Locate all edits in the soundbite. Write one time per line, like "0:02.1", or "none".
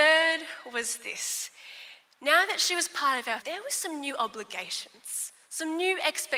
0:03.4